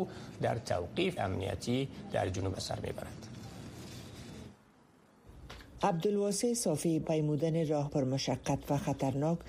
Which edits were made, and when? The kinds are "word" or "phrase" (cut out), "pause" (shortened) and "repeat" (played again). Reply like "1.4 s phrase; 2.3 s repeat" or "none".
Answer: 1.2 s word; 2.5 s word; 7.0 s word; 7.9 s word